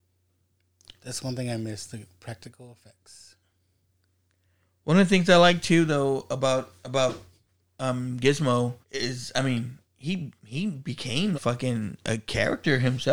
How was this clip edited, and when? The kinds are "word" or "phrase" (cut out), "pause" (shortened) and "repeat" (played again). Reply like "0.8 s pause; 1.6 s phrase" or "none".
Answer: 8.8 s pause; 9.8 s pause; 11.3 s word